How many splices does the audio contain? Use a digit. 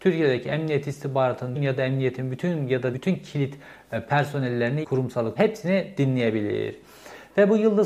4